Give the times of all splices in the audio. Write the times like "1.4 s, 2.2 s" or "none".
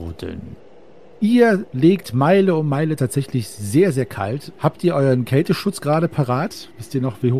3.0 s